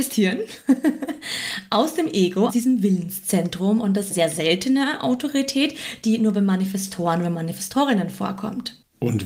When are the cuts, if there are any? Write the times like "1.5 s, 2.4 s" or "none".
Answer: 2.5 s, 4.1 s